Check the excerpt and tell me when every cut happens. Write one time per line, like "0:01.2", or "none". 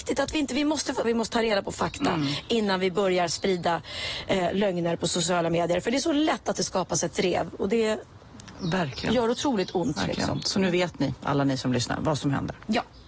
0:01.0